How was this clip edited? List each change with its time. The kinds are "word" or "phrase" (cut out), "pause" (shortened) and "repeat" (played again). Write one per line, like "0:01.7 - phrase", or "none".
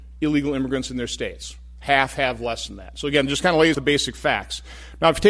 0:03.7 - word